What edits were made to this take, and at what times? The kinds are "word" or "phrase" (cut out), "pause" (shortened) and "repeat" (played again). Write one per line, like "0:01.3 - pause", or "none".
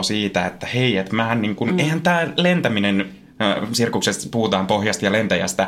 none